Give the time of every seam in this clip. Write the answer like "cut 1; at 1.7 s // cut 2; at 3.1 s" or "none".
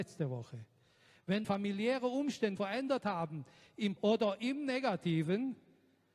cut 1; at 1.4 s // cut 2; at 2.6 s // cut 3; at 4.0 s